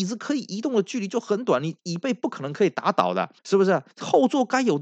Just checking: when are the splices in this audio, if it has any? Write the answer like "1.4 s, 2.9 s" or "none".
3.4 s, 3.9 s